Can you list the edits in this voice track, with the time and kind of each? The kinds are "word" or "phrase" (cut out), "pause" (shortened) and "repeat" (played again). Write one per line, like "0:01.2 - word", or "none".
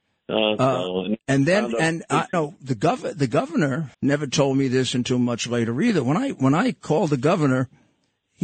0:01.2 - pause
0:02.3 - word
0:03.9 - pause